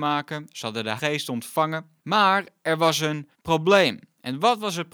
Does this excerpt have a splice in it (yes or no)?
yes